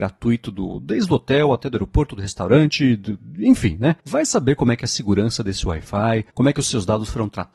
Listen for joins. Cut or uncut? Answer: cut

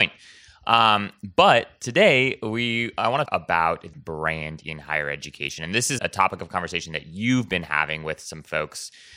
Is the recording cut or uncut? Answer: cut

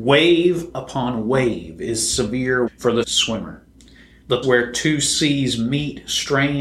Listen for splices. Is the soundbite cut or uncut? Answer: cut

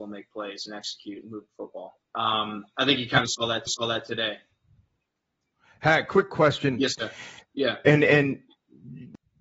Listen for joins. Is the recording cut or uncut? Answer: cut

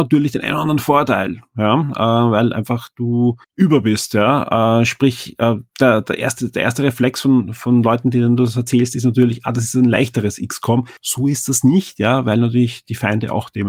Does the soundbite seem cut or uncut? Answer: cut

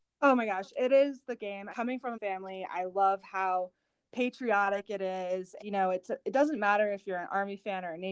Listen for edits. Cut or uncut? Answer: cut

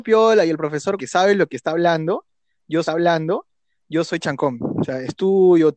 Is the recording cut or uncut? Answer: cut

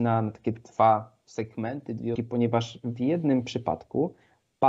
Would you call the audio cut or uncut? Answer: cut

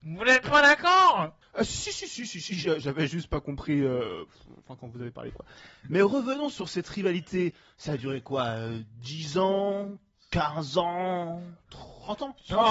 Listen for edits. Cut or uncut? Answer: uncut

